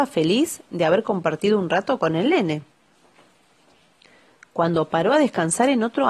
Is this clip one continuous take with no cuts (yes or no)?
yes